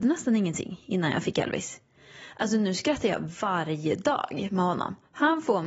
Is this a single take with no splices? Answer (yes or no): yes